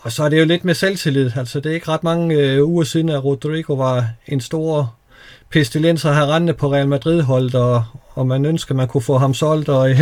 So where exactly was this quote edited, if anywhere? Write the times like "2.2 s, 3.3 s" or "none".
none